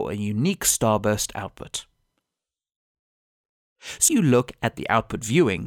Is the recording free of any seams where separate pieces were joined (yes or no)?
no